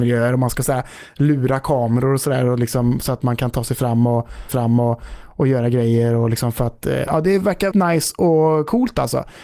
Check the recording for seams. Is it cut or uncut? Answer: cut